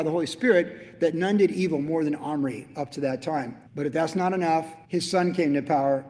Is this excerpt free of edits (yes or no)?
no